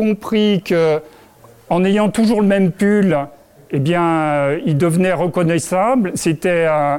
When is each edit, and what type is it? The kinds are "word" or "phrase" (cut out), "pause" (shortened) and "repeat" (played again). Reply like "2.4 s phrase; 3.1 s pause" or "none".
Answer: none